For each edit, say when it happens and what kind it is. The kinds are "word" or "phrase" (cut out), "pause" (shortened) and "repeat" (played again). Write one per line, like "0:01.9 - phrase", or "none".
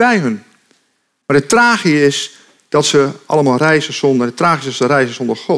none